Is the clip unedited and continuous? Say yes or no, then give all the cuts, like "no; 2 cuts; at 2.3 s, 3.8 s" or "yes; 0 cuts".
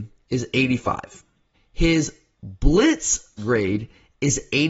no; 2 cuts; at 1.5 s, 3.4 s